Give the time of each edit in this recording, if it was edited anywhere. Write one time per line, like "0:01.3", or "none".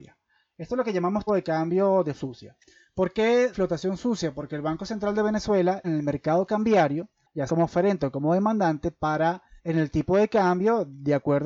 0:01.3
0:02.1
0:03.5
0:05.8
0:07.5
0:09.6